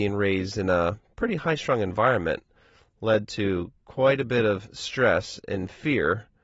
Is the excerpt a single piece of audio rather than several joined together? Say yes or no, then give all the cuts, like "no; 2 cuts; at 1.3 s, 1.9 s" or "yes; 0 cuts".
yes; 0 cuts